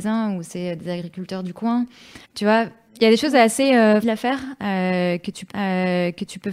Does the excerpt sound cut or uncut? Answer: cut